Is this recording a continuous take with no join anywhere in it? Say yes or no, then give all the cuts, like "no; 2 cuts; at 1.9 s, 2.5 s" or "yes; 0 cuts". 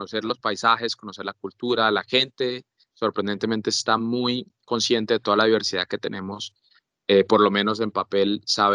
yes; 0 cuts